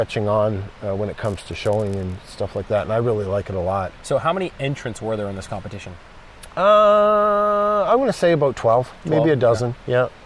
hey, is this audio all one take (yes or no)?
yes